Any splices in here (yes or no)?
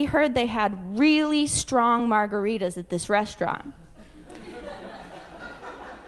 no